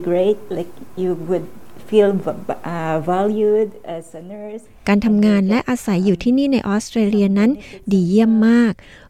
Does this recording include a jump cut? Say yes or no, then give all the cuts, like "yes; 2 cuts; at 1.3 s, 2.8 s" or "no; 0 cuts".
no; 0 cuts